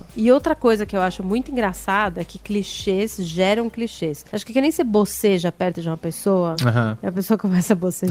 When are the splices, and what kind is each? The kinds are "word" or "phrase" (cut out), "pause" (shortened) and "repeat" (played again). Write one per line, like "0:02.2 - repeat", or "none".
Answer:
none